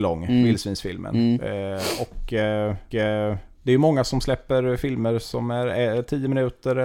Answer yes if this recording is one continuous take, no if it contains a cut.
no